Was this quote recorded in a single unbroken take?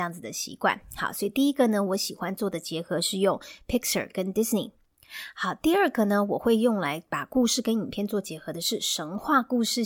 yes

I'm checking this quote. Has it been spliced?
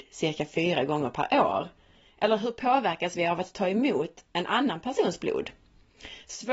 no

